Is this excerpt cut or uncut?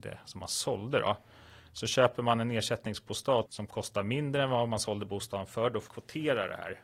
cut